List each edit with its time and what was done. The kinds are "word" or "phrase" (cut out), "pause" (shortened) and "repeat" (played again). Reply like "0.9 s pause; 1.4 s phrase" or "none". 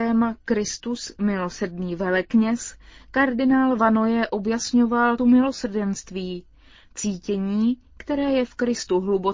5.2 s word